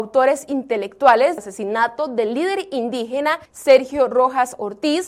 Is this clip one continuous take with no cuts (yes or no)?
no